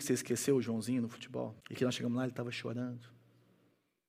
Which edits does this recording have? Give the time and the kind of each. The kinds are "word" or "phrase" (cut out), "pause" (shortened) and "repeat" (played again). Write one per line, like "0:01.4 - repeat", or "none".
0:01.6 - pause